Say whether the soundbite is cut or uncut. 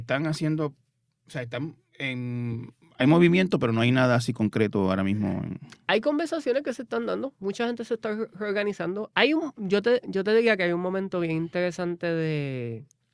uncut